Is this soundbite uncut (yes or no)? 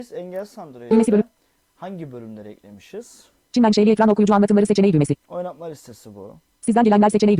yes